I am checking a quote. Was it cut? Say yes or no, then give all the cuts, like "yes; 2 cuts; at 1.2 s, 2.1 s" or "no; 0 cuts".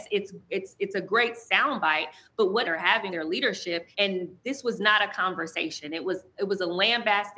yes; 3 cuts; at 2.6 s, 3.1 s, 3.9 s